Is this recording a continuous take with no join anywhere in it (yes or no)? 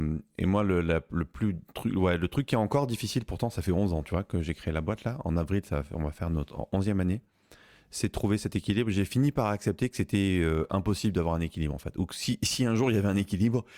yes